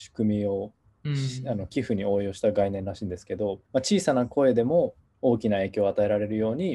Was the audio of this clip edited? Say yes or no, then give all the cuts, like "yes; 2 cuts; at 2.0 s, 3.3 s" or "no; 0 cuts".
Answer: yes; 2 cuts; at 3.6 s, 5.0 s